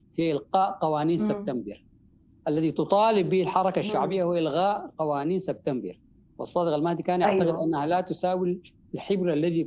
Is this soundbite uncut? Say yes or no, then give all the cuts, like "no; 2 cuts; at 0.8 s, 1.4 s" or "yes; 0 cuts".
yes; 0 cuts